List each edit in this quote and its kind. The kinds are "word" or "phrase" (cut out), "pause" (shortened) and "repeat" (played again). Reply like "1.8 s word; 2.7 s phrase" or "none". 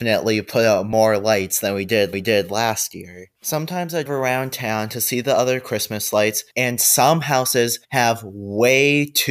2.1 s repeat; 3.4 s pause; 4.1 s word; 6.5 s pause; 7.8 s pause